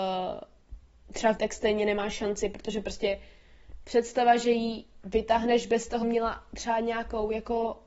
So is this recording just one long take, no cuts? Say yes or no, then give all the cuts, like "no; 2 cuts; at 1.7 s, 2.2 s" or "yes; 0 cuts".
no; 2 cuts; at 1.4 s, 6.0 s